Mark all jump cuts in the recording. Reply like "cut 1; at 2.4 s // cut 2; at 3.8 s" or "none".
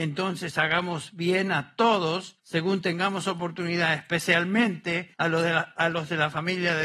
cut 1; at 2.4 s // cut 2; at 5.1 s